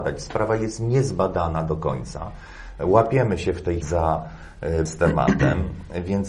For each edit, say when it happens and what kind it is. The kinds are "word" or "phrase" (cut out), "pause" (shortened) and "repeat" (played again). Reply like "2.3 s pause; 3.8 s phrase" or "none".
3.8 s word; 4.9 s word